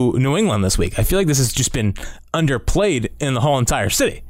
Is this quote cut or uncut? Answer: uncut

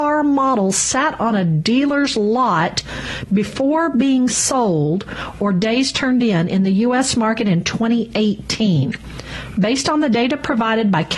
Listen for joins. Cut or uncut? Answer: uncut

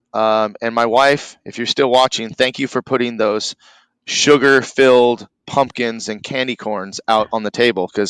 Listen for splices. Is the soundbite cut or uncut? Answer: uncut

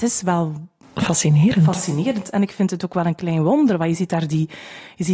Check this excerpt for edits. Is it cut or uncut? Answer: uncut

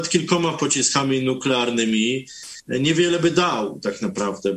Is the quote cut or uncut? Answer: uncut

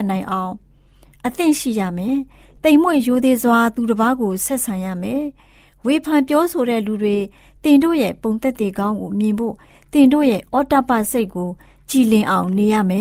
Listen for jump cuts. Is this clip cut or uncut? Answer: uncut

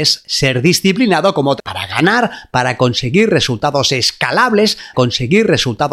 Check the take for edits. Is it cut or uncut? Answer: cut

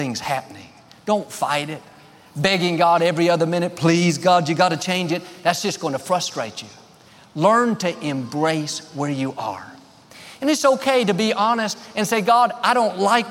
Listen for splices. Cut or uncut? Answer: uncut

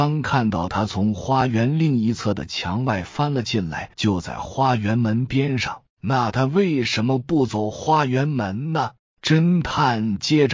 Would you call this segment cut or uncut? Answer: cut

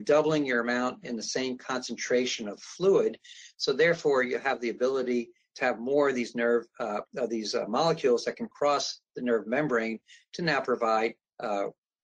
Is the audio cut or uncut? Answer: uncut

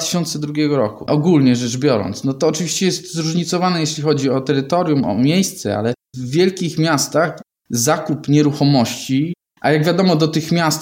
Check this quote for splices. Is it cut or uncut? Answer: uncut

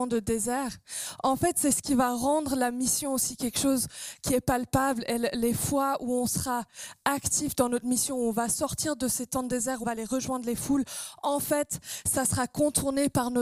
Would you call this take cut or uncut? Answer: cut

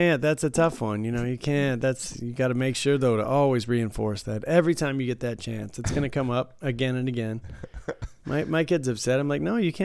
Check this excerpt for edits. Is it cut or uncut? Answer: uncut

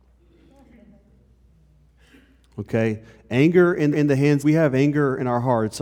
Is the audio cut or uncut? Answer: cut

